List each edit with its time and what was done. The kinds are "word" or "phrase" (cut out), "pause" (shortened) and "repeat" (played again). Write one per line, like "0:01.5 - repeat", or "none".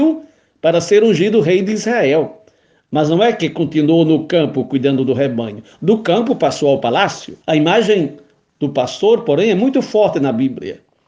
0:07.4 - pause